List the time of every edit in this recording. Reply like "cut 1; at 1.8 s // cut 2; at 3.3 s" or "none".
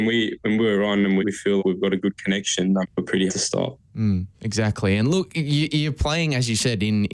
cut 1; at 1.2 s // cut 2; at 1.6 s // cut 3; at 2.8 s // cut 4; at 3.3 s // cut 5; at 4.3 s